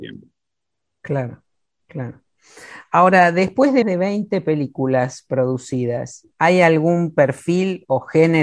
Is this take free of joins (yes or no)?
no